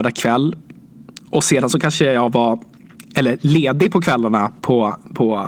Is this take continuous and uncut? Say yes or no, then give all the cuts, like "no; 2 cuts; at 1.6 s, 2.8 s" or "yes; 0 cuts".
no; 1 cut; at 4.6 s